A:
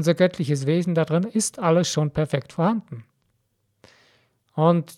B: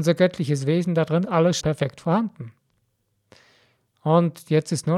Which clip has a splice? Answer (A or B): B